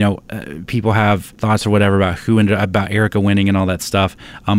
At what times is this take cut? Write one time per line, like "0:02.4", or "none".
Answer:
0:01.3